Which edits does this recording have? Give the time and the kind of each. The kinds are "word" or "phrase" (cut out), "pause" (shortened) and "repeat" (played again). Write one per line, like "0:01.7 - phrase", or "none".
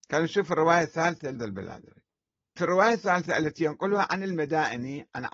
0:01.3 - word
0:02.6 - word